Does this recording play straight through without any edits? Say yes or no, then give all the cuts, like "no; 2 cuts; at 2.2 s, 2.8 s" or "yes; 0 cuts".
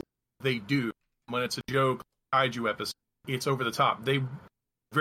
yes; 0 cuts